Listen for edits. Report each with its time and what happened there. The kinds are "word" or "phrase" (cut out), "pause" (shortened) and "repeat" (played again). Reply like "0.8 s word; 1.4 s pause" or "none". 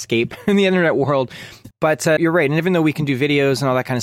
1.7 s word; 2.2 s word